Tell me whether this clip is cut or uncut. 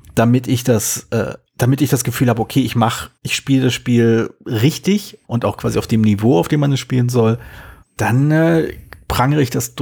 cut